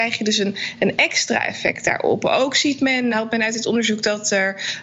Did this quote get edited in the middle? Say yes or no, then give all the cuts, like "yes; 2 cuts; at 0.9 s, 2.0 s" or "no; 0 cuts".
yes; 1 cut; at 3.1 s